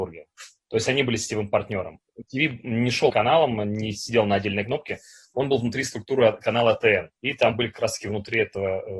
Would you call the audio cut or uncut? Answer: cut